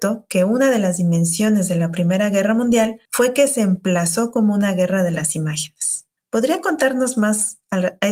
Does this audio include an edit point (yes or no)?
yes